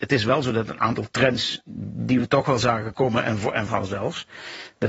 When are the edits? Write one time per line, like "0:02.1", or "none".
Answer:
0:03.7